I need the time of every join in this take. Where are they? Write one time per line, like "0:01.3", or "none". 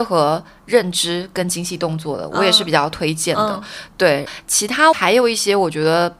none